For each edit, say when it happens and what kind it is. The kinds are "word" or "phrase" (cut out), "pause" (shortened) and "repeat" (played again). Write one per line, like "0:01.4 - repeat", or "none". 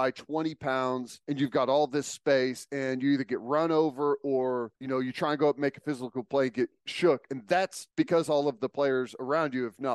0:01.2 - pause
0:04.8 - pause
0:07.9 - pause